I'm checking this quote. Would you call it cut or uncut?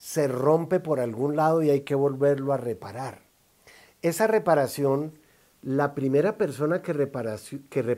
uncut